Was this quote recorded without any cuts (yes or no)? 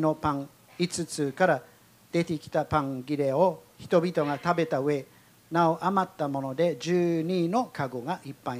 yes